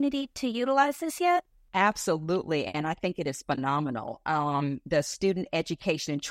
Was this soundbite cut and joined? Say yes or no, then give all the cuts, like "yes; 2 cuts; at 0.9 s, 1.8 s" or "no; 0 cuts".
no; 0 cuts